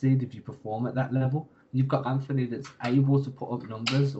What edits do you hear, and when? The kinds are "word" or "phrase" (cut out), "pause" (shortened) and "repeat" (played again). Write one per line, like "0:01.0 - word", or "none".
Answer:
0:02.0 - word